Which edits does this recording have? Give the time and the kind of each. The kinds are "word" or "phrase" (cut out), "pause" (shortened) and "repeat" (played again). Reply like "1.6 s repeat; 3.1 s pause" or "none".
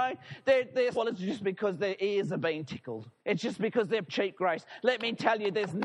0.9 s phrase; 3.2 s pause; 4.1 s phrase

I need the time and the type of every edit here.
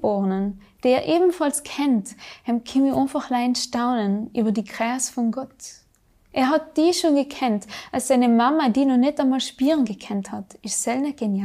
none

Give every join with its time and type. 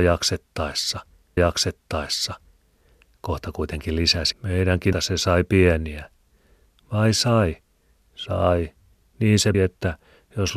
1.4 s repeat; 4.3 s word; 4.9 s word; 9.5 s word

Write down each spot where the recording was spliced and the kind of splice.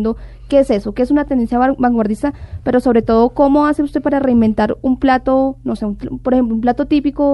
none

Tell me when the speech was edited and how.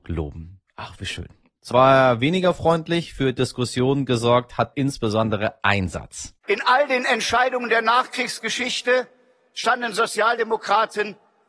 1.7 s word; 4.7 s word; 6.4 s pause

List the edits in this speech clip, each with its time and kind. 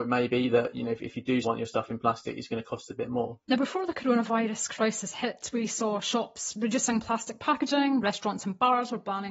1.4 s word; 3.4 s pause

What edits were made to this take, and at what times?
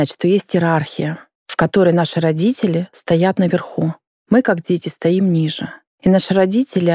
none

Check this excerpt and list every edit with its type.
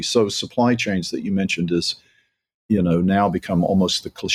none

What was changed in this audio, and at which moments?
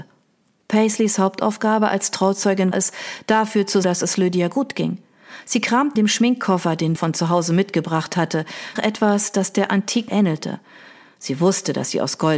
2.7 s word; 3.8 s word; 6.0 s word; 7.0 s word; 8.8 s word; 10.1 s word

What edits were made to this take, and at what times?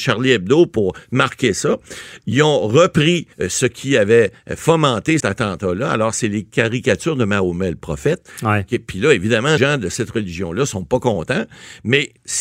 3.3 s pause; 5.2 s word; 9.6 s word

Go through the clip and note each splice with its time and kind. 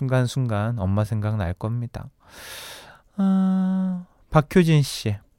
none

